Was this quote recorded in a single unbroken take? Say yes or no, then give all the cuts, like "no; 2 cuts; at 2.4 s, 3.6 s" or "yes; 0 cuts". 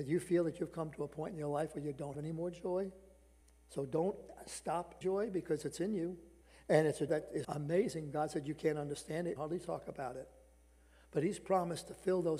no; 7 cuts; at 2.1 s, 3.4 s, 5.0 s, 6.4 s, 7.1 s, 7.4 s, 9.4 s